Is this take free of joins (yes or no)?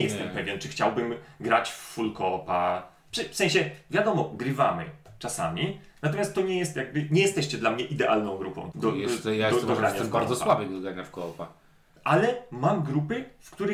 no